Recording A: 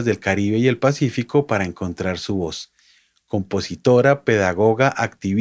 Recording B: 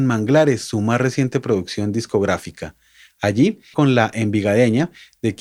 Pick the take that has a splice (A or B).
B